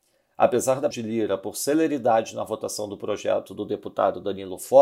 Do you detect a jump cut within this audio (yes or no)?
yes